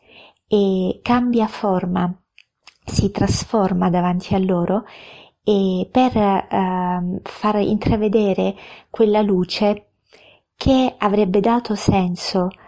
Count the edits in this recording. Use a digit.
0